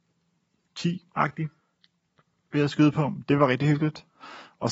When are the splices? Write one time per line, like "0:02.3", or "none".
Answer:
none